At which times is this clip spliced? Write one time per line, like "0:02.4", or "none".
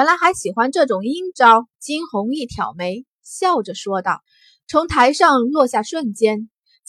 0:01.7
0:04.3